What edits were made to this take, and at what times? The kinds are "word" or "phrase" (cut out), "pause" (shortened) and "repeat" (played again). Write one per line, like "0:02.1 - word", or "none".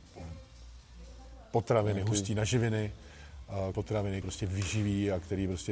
0:03.7 - word
0:04.2 - word